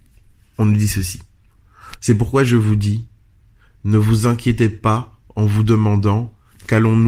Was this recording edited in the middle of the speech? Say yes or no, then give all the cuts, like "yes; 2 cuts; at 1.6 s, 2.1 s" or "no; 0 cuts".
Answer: no; 0 cuts